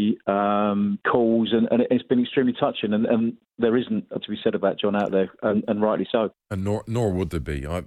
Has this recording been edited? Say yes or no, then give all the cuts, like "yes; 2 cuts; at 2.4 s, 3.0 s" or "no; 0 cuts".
yes; 2 cuts; at 1.0 s, 4.2 s